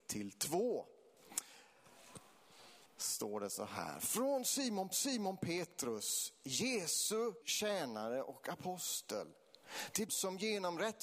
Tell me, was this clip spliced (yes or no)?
yes